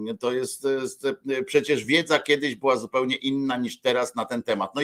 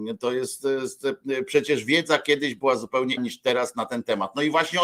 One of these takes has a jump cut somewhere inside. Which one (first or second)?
second